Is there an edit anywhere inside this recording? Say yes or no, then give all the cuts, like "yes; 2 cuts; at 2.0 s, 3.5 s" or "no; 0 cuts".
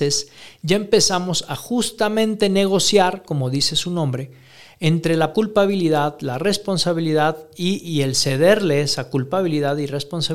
yes; 1 cut; at 5.3 s